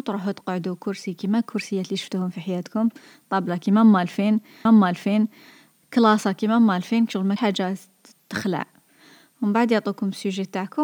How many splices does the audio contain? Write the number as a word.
two